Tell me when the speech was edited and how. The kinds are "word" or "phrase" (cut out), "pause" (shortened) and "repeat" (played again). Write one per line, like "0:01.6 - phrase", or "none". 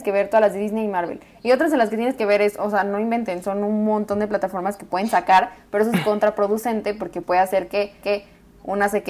0:07.2 - word
0:08.0 - repeat